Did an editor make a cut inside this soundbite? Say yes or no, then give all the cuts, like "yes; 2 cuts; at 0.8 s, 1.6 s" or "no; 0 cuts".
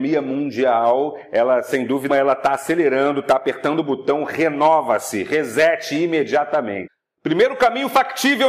yes; 1 cut; at 2.1 s